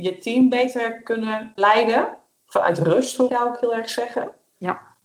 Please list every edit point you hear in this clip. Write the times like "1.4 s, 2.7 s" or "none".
1.6 s, 3.3 s